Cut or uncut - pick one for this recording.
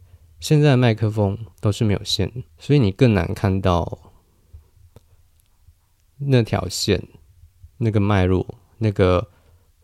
cut